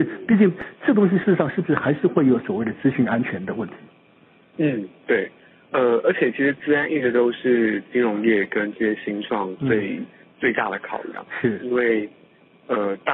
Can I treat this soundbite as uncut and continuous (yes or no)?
yes